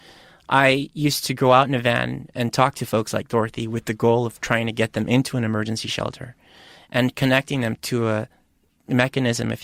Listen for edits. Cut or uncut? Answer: uncut